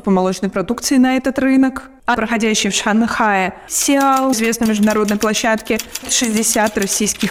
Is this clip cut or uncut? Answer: cut